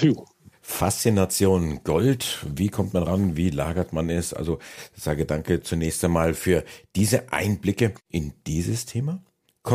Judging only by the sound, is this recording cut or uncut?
uncut